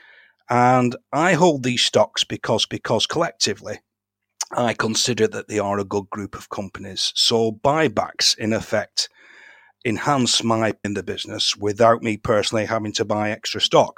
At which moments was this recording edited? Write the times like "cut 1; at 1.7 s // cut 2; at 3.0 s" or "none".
cut 1; at 2.7 s // cut 2; at 10.8 s